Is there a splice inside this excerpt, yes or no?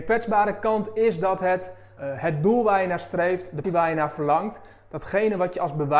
yes